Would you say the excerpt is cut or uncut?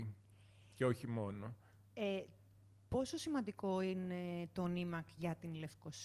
uncut